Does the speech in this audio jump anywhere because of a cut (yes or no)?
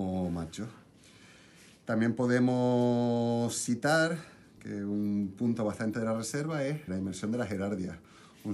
yes